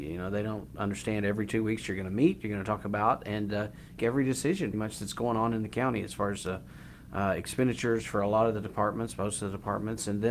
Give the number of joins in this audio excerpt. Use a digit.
2